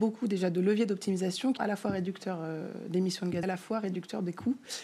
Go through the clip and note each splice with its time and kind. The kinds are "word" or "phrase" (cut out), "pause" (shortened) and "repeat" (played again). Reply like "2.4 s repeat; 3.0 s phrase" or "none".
1.6 s word; 3.4 s phrase